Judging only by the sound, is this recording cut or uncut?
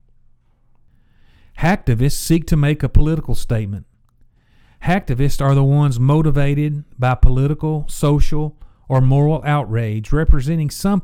uncut